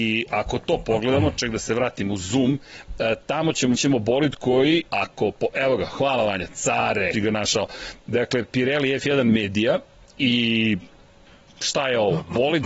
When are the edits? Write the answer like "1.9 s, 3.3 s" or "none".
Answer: 3.8 s, 4.9 s, 7.1 s, 11.3 s

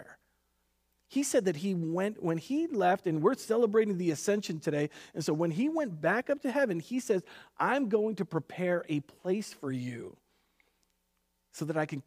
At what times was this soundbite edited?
none

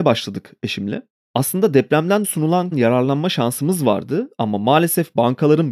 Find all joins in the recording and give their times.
2.2 s, 2.7 s

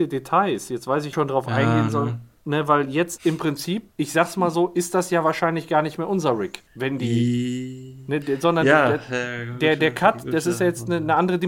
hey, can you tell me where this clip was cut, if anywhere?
1.1 s, 3.9 s, 6.7 s

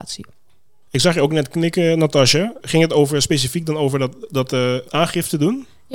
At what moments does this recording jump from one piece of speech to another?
4.8 s

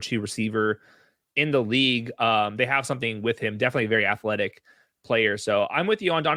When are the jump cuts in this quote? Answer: none

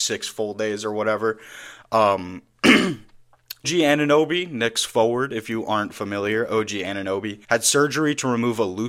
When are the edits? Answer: 3.6 s, 7.4 s

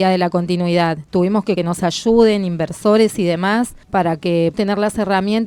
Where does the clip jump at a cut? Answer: 1.6 s, 3.8 s, 4.5 s

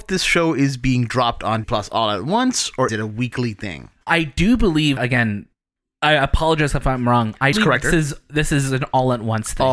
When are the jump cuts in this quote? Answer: 1.6 s, 2.9 s, 4.1 s, 5.0 s, 7.5 s, 7.8 s

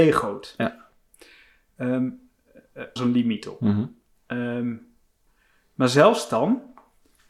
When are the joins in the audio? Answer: 3.0 s, 4.2 s

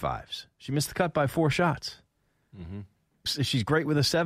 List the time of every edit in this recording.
3.3 s

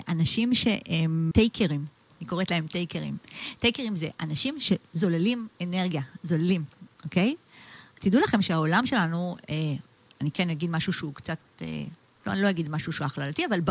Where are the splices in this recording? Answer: 1.3 s

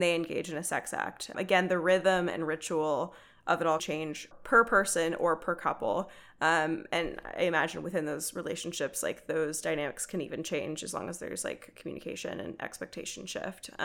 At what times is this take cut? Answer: 1.3 s, 3.8 s, 4.3 s

